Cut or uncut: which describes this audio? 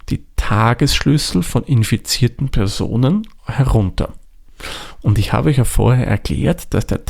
cut